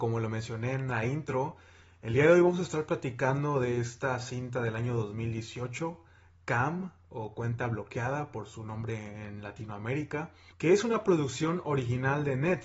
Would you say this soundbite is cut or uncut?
uncut